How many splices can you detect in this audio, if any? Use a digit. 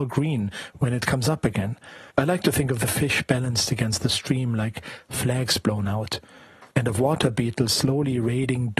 2